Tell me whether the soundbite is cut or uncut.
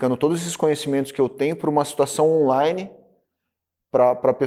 uncut